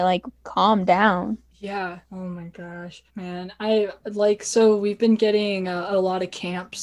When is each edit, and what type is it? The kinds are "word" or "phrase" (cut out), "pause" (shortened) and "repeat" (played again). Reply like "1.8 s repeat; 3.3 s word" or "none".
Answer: 2.0 s pause; 3.1 s pause